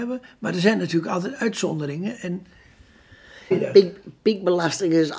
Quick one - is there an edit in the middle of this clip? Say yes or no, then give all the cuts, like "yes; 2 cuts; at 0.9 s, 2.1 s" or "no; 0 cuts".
yes; 1 cut; at 3.5 s